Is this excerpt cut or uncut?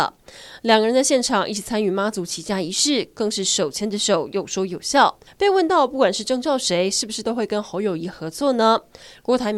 cut